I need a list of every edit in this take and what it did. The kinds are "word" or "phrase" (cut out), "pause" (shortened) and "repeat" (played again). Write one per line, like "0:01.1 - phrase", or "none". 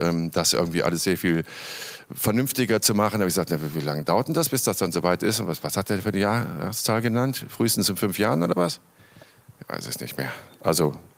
none